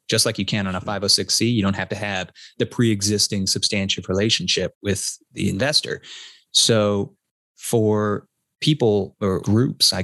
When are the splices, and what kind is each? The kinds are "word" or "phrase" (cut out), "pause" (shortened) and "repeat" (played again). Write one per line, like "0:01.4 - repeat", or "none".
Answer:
0:04.7 - word
0:05.2 - word